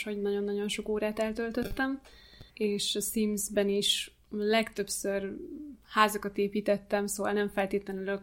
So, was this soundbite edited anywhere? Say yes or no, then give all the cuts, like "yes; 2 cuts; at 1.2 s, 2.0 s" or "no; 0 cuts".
yes; 1 cut; at 2.5 s